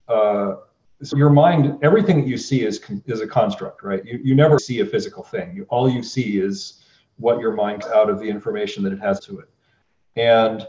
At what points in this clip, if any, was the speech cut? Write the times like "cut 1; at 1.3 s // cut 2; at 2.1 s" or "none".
cut 1; at 1.1 s // cut 2; at 4.6 s // cut 3; at 7.8 s // cut 4; at 9.2 s